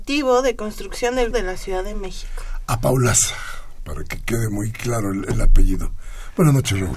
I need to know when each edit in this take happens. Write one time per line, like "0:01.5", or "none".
0:01.3